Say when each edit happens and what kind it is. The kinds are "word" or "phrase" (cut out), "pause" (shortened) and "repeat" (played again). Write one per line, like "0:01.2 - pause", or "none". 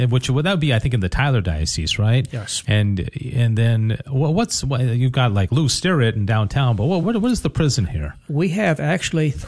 0:07.0 - word

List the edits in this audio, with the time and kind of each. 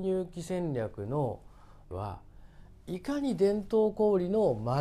0:01.9 - word

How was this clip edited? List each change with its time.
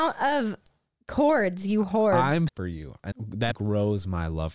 0:02.5 - word
0:03.1 - word
0:03.5 - word

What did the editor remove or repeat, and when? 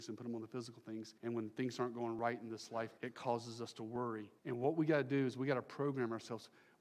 0:01.2 - pause
0:03.0 - pause
0:04.4 - pause

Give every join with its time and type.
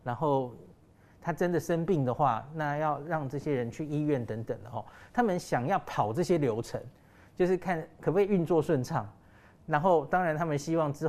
none

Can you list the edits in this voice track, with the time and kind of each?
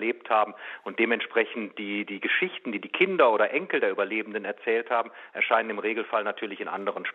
none

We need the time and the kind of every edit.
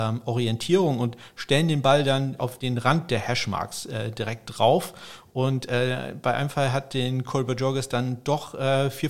0:02.4 - word

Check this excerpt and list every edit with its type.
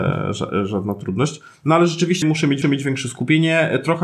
0:02.2 - word
0:02.6 - repeat

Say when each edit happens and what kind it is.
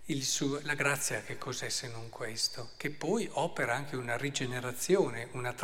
none

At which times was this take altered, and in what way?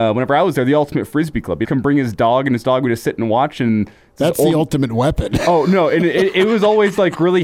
0:01.6 - word

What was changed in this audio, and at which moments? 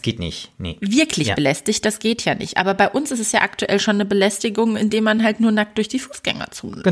none

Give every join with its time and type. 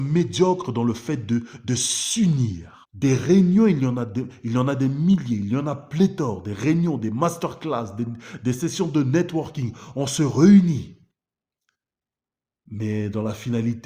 0:02.8 - pause

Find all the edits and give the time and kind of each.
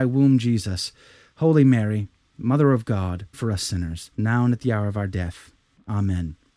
0:03.3 - word
0:04.1 - pause

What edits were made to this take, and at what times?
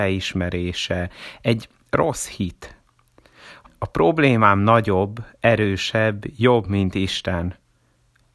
0:03.7 - phrase

